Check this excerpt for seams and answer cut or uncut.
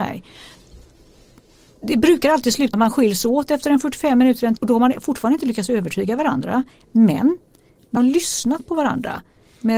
cut